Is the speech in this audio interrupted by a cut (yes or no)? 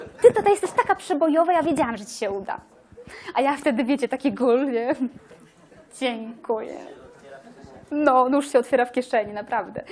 no